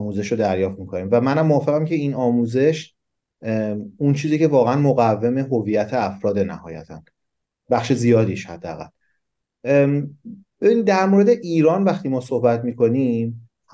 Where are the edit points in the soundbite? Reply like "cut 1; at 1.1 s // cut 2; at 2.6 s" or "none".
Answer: none